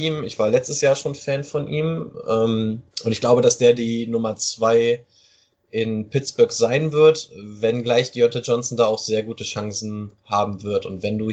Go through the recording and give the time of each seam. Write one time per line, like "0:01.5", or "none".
0:02.9